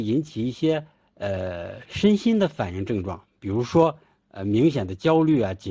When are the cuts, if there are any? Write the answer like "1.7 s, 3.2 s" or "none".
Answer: none